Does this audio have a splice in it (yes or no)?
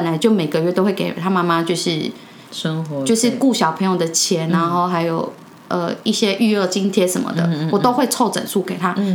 no